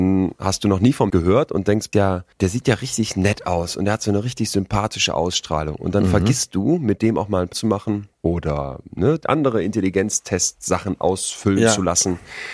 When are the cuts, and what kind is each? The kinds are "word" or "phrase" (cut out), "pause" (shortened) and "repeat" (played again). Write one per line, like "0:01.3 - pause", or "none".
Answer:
0:01.1 - word
0:01.9 - phrase
0:02.3 - pause
0:07.5 - word
0:08.1 - pause
0:09.2 - phrase